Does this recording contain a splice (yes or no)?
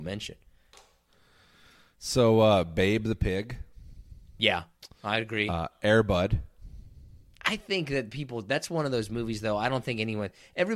no